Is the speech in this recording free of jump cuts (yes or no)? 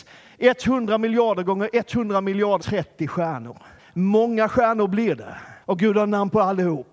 no